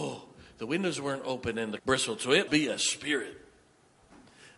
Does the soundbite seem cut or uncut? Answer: cut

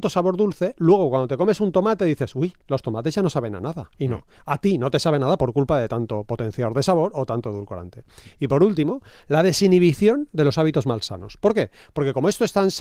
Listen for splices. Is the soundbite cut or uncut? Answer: uncut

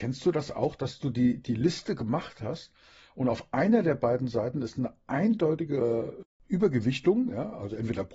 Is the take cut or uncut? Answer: uncut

